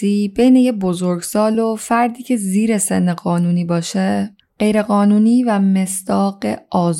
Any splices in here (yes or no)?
no